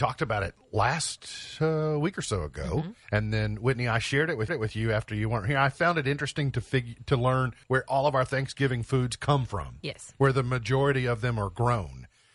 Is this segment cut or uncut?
cut